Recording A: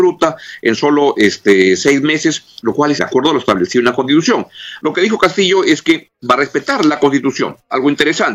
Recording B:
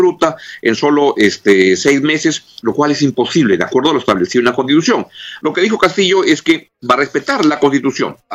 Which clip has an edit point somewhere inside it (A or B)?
A